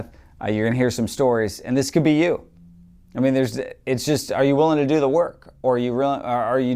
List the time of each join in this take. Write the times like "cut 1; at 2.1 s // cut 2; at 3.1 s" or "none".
none